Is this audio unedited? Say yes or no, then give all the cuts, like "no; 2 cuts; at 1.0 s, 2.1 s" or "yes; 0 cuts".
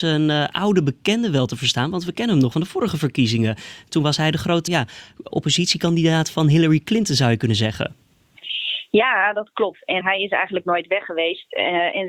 no; 4 cuts; at 2.5 s, 4.7 s, 5.3 s, 10.0 s